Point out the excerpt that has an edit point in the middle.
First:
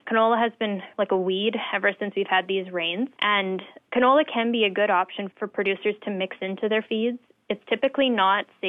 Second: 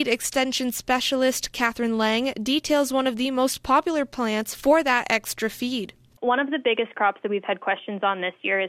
first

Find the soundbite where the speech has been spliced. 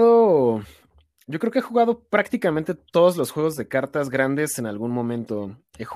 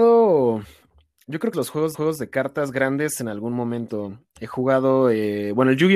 second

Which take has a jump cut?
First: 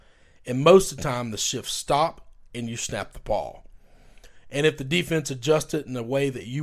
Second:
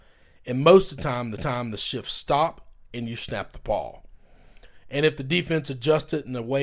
second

